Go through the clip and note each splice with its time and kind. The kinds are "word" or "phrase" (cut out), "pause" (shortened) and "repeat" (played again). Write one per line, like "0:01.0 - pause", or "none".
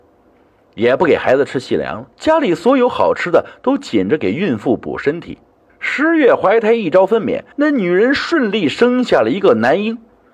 0:02.1 - pause
0:05.7 - pause
0:07.5 - pause